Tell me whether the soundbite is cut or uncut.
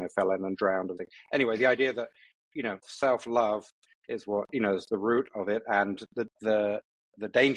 cut